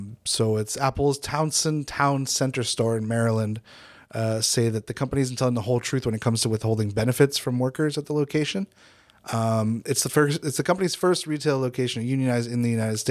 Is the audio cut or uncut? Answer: uncut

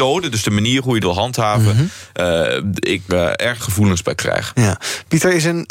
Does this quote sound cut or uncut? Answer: cut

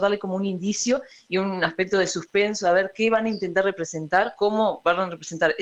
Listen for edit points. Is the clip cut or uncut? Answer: uncut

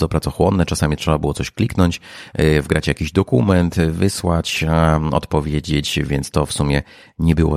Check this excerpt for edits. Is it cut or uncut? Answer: uncut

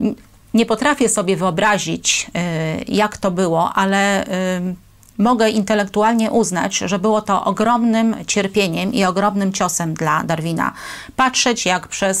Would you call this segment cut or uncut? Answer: uncut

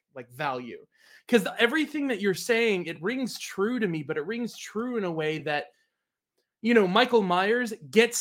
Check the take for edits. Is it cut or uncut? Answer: uncut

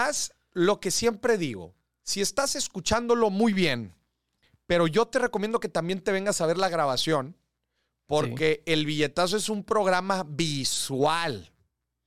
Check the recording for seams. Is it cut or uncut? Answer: uncut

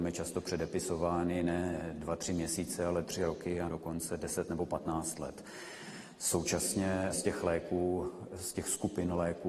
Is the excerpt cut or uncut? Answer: cut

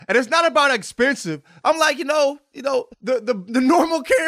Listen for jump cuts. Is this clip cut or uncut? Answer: cut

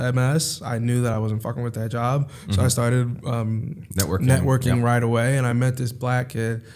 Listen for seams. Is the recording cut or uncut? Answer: uncut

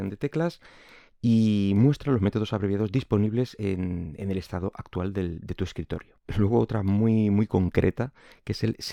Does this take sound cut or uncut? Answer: uncut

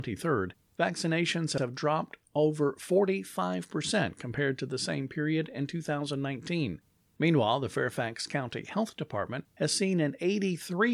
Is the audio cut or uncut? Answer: uncut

